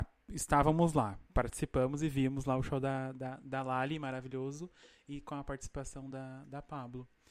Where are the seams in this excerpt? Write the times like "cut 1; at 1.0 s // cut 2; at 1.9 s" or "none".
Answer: none